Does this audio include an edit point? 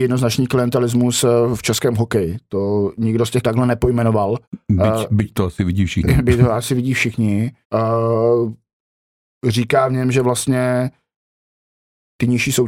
yes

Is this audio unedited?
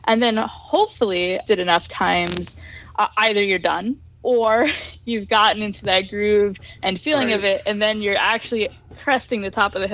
no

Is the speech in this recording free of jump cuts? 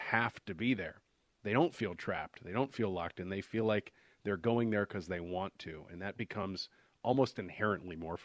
yes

